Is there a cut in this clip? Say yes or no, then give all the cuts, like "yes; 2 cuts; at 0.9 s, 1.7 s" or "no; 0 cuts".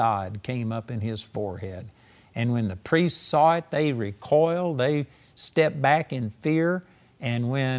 no; 0 cuts